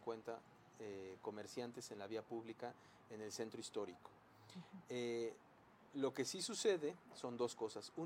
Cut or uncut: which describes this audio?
uncut